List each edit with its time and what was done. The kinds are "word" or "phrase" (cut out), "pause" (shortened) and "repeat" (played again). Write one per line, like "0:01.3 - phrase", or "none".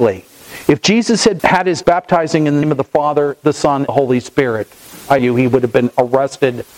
0:01.4 - word
0:01.8 - word
0:02.6 - word
0:03.9 - word
0:05.2 - word